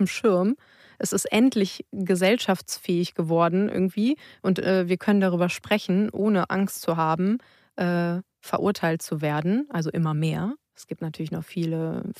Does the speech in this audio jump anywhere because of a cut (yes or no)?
no